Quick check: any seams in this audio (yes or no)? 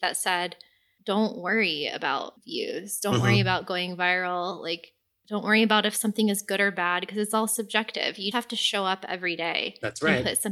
yes